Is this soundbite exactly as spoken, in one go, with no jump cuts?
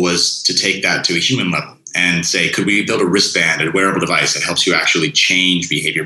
yes; 0 cuts

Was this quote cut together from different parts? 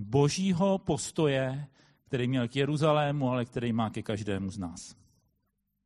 no; 0 cuts

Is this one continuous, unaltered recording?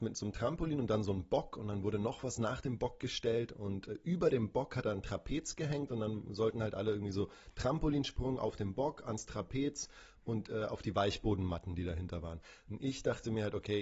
yes; 0 cuts

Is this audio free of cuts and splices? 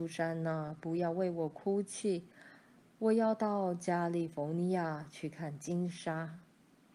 yes; 0 cuts

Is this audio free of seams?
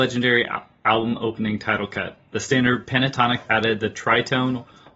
no; 1 cut; at 3.5 s

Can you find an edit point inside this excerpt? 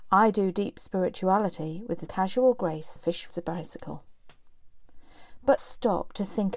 yes; 4 cuts; at 2.1 s, 3.0 s, 3.3 s, 5.6 s

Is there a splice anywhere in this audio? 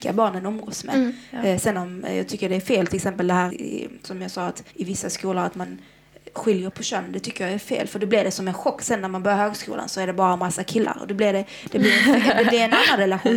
yes; 3 cuts; at 3.5 s, 4.7 s, 6.7 s

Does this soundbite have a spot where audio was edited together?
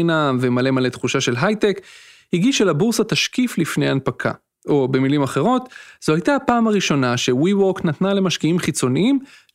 no; 0 cuts

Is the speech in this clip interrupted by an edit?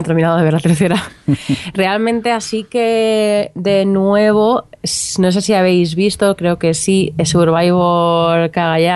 no; 0 cuts

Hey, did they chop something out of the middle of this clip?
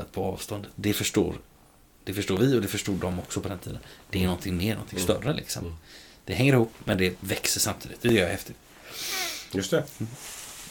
no; 0 cuts

